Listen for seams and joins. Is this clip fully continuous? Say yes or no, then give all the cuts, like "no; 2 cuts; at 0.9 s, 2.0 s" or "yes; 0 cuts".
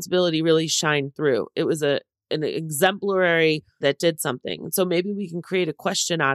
no; 1 cut; at 3.8 s